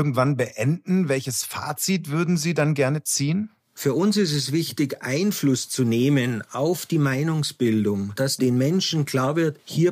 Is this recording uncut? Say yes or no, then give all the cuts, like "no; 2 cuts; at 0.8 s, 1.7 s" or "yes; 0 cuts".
yes; 0 cuts